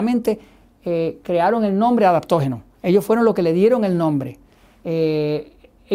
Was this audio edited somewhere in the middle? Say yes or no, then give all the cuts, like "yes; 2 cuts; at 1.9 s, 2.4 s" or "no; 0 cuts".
no; 0 cuts